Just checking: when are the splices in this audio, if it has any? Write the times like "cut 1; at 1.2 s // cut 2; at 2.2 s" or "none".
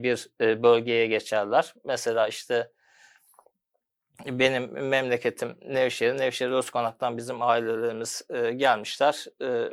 none